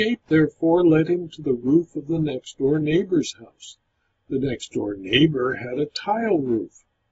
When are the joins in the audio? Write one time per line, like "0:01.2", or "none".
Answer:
none